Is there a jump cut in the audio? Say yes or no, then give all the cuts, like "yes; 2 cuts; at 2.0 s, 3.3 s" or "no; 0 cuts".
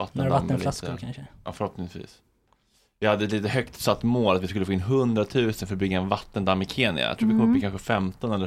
no; 0 cuts